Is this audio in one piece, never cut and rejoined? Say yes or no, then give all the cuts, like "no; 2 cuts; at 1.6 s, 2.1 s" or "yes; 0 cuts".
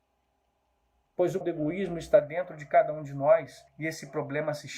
no; 2 cuts; at 1.4 s, 3.7 s